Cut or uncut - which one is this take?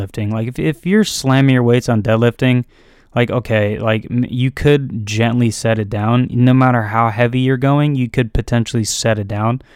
uncut